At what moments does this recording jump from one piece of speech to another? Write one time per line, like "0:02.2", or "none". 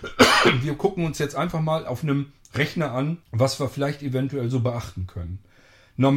0:03.2